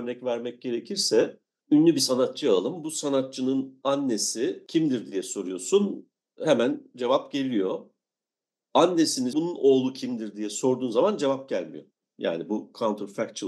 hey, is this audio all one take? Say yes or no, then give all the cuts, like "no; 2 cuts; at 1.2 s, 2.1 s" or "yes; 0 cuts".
no; 1 cut; at 9.3 s